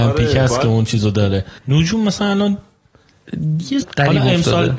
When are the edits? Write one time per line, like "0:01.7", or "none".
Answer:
0:01.6
0:03.8